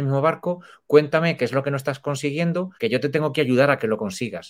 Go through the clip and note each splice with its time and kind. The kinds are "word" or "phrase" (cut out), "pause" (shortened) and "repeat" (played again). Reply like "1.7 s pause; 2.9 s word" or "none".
2.8 s pause